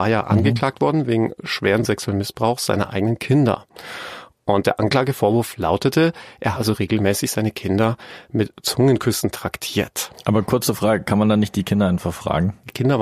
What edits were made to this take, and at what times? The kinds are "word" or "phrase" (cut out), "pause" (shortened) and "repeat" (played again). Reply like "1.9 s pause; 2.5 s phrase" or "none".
6.5 s word